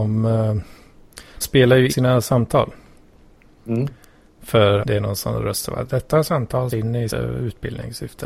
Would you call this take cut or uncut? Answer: cut